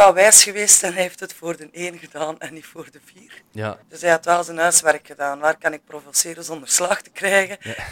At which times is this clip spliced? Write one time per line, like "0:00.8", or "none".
0:03.8